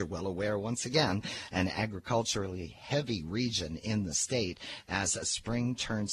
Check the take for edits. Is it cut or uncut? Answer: uncut